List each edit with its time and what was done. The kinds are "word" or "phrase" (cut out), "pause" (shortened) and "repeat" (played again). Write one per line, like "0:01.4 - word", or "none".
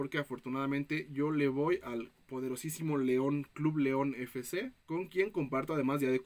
0:04.8 - pause